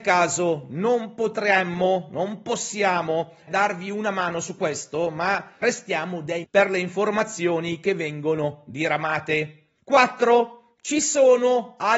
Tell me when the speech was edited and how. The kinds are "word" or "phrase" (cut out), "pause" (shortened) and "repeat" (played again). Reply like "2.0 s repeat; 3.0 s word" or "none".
3.5 s word; 5.6 s word; 6.4 s word; 9.8 s pause